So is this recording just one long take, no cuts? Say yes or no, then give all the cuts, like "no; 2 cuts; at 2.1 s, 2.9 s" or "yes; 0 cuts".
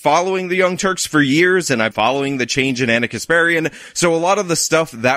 no; 1 cut; at 1.9 s